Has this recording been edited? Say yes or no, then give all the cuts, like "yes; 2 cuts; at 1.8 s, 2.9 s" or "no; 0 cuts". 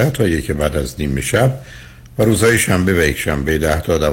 no; 0 cuts